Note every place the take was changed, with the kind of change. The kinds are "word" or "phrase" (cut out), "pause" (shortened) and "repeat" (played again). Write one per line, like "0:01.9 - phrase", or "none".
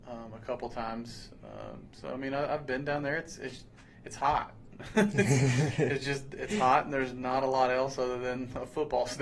none